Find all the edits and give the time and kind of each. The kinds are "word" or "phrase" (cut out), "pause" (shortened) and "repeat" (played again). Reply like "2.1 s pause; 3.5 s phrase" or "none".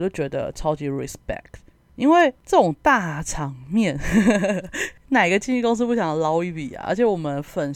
none